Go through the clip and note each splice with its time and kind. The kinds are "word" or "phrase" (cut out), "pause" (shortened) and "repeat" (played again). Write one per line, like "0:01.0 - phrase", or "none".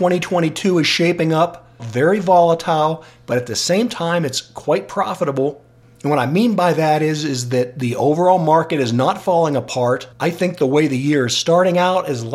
0:01.8 - phrase
0:10.1 - pause